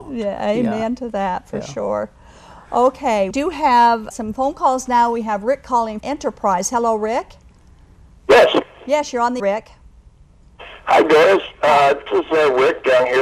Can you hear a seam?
yes; 5 cuts; at 3.3 s, 4.1 s, 6.0 s, 9.4 s, 12.1 s

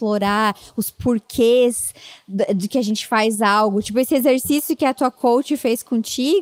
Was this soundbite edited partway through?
no; 0 cuts

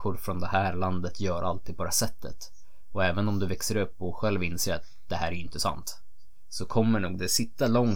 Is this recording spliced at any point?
yes; 1 cut; at 1.9 s

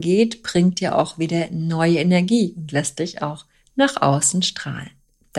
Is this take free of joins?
yes; 0 cuts

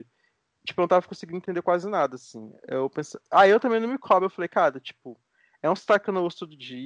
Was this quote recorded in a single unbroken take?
yes; 0 cuts

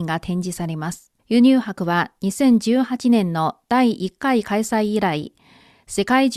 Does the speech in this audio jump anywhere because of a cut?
yes; 1 cut; at 1.2 s

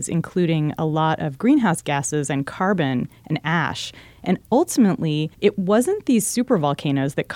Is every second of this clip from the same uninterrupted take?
no; 1 cut; at 5.3 s

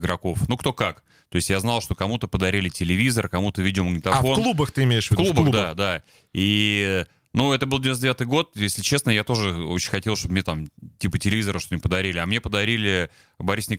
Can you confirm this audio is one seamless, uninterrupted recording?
yes; 0 cuts

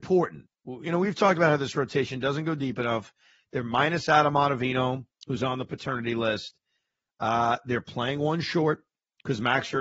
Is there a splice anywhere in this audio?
no; 0 cuts

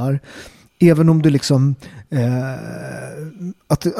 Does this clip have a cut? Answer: no; 0 cuts

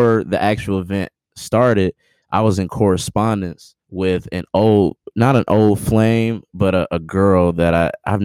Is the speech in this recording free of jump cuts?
no; 1 cut; at 3.8 s

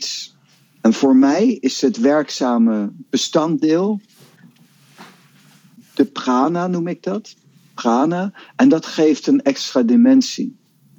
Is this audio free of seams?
yes; 0 cuts

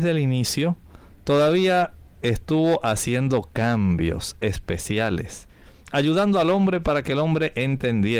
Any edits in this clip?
no; 0 cuts

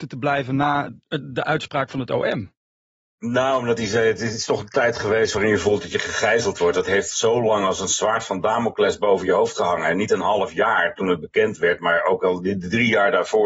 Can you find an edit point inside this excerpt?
no; 0 cuts

